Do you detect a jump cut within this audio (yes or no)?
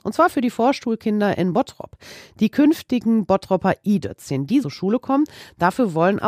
yes